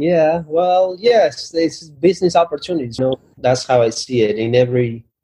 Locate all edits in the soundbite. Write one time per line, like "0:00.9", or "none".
0:03.0
0:03.4